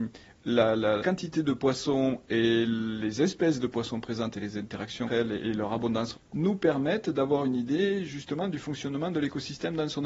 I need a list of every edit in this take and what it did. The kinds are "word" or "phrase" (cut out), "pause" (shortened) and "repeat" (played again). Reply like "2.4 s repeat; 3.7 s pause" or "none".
1.0 s word; 5.1 s word; 6.1 s word